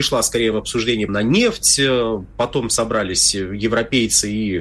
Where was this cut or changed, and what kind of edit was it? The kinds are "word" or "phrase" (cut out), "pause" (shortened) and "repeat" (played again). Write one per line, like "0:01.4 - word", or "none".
0:01.1 - phrase